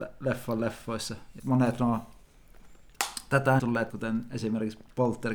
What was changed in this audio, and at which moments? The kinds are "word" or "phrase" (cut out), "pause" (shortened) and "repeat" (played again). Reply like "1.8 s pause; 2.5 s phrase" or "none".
1.4 s word; 3.6 s word; 3.9 s word